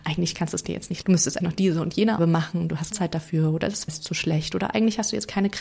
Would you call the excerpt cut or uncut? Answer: cut